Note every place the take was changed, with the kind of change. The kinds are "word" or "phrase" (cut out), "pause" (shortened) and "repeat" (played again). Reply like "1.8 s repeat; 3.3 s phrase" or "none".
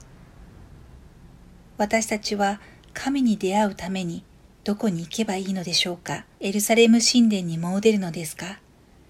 6.3 s pause